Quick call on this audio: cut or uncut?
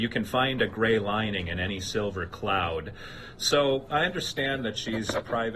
uncut